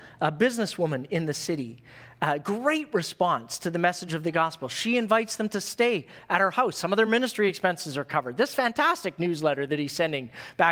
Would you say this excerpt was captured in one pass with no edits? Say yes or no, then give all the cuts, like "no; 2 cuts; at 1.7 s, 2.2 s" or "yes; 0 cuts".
yes; 0 cuts